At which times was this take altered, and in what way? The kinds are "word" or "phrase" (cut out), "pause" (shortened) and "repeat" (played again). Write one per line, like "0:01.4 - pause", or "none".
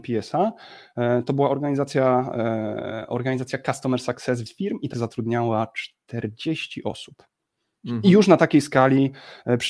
0:04.5 - word
0:04.9 - word